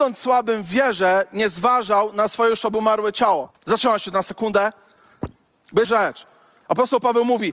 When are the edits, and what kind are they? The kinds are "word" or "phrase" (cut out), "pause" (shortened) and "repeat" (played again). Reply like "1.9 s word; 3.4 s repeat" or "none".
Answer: 3.5 s pause; 5.8 s word